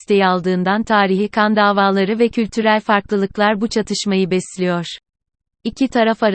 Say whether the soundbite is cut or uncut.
uncut